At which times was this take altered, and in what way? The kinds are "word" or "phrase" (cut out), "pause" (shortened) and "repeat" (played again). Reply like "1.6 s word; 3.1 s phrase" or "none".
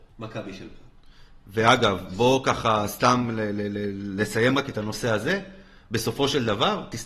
none

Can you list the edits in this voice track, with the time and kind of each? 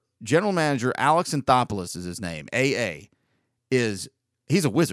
none

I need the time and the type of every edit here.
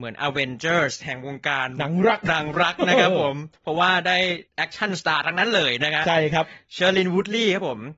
4.5 s pause

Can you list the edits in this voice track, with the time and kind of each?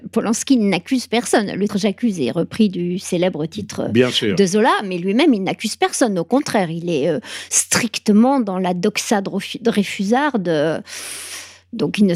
1.7 s word

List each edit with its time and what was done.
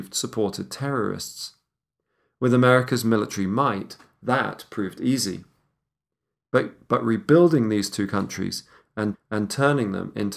9.1 s repeat

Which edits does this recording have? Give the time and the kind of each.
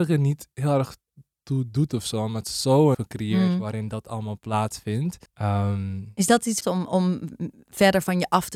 2.9 s phrase; 5.3 s pause; 6.6 s phrase

